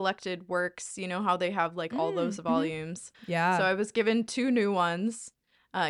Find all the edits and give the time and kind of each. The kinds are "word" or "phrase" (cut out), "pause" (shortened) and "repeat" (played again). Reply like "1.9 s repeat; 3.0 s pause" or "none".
3.1 s pause